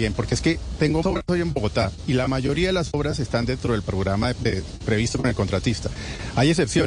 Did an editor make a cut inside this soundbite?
yes; 2 cuts; at 1.0 s, 4.3 s

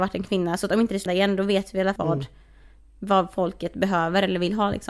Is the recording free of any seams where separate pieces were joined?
no; 2 cuts; at 1.1 s, 2.0 s

